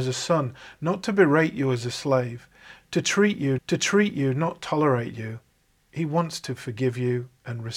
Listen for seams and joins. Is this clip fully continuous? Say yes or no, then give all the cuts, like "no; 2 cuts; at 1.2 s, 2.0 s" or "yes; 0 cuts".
no; 1 cut; at 3.6 s